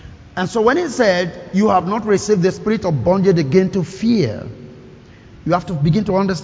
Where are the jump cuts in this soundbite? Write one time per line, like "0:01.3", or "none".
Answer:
none